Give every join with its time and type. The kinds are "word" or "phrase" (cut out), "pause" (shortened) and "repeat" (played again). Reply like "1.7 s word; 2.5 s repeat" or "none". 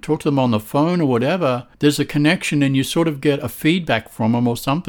1.7 s pause